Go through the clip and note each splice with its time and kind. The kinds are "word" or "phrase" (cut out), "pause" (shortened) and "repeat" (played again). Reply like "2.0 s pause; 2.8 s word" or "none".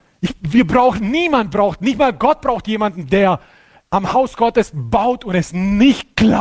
none